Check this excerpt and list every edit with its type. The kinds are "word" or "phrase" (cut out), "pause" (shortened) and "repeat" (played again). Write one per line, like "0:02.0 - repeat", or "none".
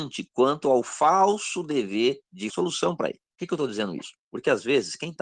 0:02.5 - phrase
0:04.2 - pause